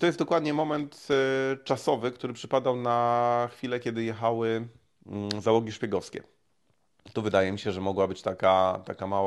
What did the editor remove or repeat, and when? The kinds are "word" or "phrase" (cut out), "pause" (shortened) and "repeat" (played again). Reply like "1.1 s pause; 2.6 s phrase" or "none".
none